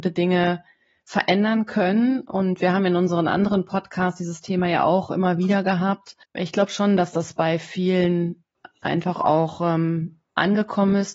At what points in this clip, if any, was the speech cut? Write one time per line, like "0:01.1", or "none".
0:06.2